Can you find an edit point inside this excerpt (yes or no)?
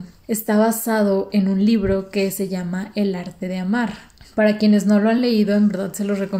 no